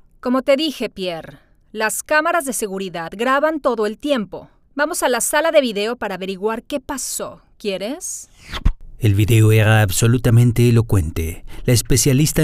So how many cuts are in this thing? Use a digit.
0